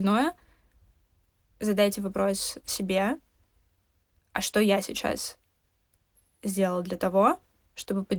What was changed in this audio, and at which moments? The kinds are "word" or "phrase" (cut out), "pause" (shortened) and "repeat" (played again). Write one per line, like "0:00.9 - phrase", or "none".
none